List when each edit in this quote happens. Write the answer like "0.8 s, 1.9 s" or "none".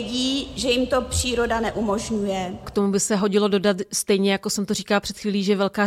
none